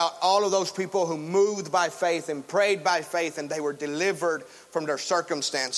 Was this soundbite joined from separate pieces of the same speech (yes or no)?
no